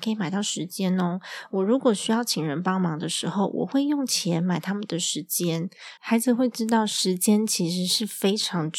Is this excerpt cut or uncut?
cut